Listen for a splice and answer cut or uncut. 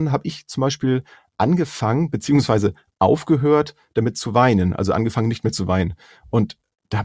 uncut